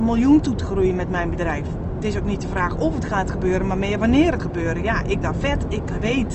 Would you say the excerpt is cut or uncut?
cut